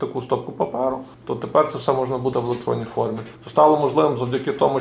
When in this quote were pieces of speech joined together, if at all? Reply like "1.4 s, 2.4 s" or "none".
1.1 s, 2.3 s, 3.3 s